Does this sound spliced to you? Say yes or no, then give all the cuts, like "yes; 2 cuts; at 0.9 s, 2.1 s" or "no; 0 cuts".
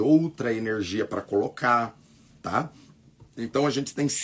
no; 0 cuts